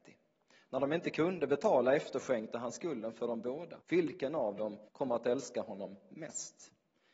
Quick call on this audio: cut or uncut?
cut